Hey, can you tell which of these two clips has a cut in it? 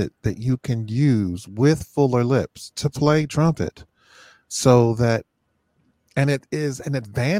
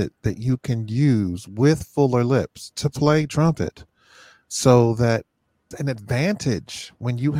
second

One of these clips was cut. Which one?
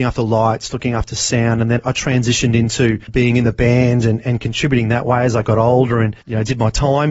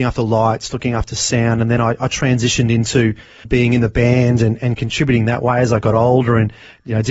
first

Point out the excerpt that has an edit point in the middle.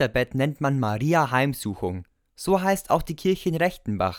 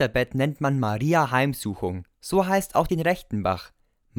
second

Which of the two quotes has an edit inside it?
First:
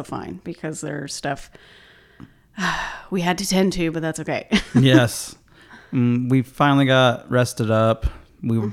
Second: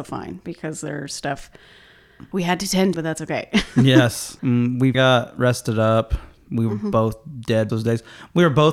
second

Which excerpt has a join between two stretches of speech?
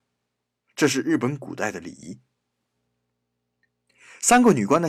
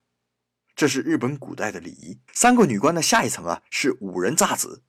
second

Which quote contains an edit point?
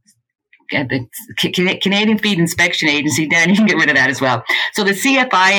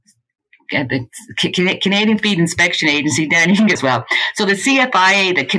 second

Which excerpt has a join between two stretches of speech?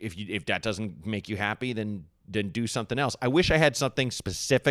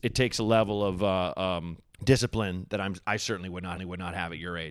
second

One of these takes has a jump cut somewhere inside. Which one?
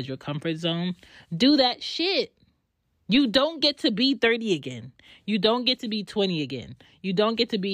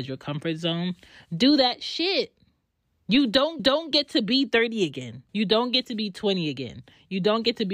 second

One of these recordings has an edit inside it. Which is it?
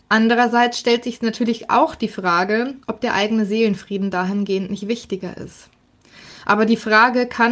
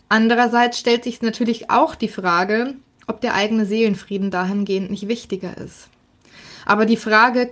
first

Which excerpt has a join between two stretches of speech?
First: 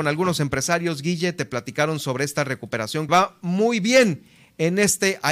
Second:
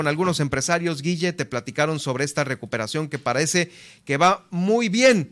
first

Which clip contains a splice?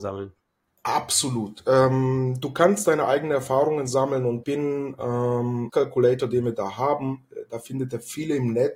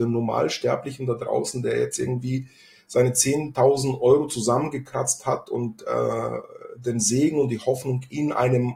first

